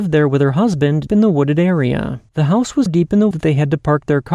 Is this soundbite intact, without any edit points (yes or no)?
no